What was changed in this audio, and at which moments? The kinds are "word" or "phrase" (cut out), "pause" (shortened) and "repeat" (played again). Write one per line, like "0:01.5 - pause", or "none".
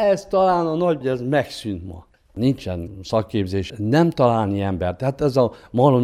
0:01.0 - word
0:03.7 - word